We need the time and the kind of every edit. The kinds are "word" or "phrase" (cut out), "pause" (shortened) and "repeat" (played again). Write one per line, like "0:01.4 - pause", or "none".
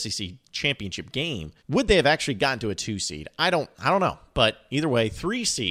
0:01.6 - pause
0:03.7 - pause